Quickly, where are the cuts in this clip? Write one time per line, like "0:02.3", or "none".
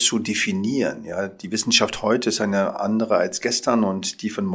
none